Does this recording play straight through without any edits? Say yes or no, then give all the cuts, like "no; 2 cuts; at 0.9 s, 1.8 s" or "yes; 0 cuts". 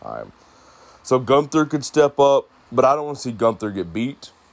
no; 1 cut; at 2.6 s